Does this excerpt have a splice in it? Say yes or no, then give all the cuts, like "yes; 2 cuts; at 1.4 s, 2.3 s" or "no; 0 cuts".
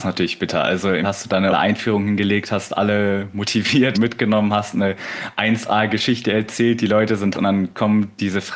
yes; 4 cuts; at 1.0 s, 1.5 s, 3.9 s, 7.3 s